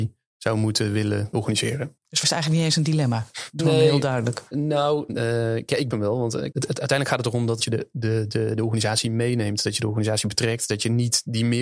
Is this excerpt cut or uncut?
cut